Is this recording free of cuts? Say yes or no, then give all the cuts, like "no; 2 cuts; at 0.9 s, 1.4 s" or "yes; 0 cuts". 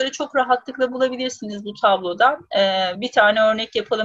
yes; 0 cuts